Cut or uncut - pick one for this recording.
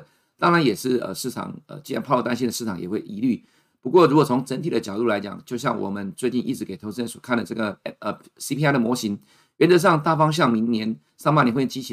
uncut